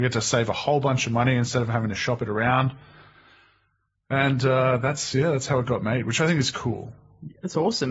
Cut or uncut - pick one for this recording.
uncut